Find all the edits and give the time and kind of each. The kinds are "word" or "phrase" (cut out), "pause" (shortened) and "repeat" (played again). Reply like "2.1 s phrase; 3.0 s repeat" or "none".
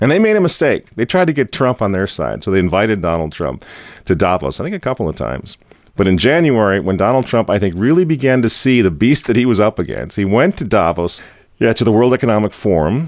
none